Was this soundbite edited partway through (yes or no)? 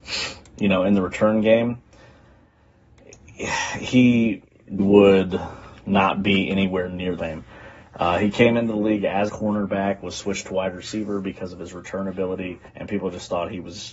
yes